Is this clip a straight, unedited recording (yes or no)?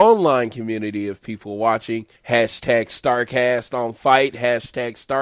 no